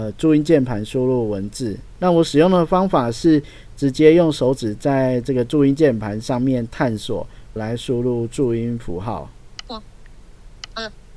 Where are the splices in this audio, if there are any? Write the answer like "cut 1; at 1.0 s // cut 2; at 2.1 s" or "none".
cut 1; at 7.6 s